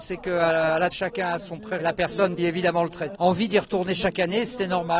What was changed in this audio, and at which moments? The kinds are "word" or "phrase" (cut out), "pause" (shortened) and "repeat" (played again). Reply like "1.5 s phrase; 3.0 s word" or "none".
0.9 s word; 1.4 s word; 1.8 s word; 2.4 s word; 3.1 s word

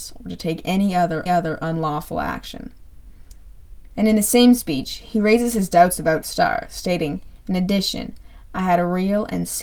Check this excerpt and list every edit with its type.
1.3 s repeat; 6.2 s word

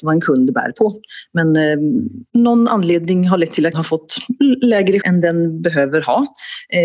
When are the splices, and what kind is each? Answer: 2.3 s pause; 3.7 s word; 5.0 s word

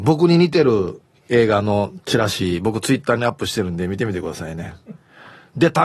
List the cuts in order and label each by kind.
none

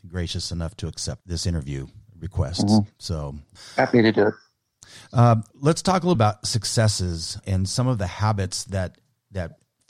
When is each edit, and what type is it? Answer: 1.2 s word; 5.5 s word; 6.2 s word; 7.4 s word

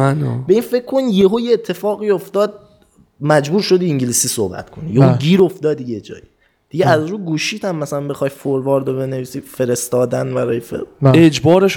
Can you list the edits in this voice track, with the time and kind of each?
none

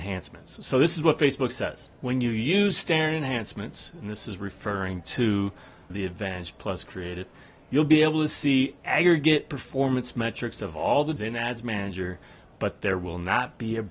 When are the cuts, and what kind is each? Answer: 1.9 s pause; 5.9 s word; 11.2 s phrase

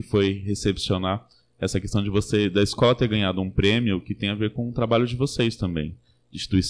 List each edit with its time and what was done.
none

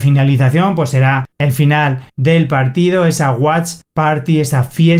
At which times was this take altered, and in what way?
2.1 s pause; 3.8 s pause

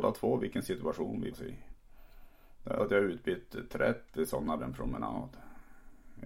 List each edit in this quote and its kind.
1.3 s word; 2.8 s word; 4.6 s phrase

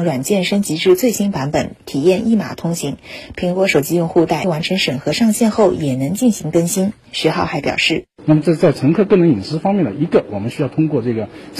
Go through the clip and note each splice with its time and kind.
4.4 s word

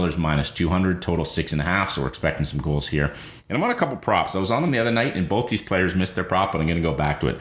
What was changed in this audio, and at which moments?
none

